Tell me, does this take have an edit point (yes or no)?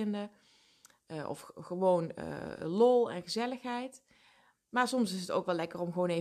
no